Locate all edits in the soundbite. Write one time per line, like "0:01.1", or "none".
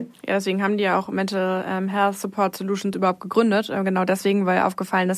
none